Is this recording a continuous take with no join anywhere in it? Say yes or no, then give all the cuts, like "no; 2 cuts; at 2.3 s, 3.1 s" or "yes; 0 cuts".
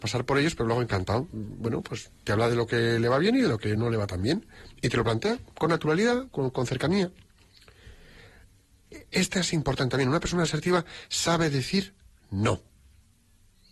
yes; 0 cuts